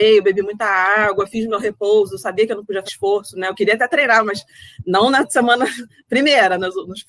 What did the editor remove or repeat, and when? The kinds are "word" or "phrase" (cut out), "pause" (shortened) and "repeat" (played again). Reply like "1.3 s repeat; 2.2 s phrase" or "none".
2.9 s word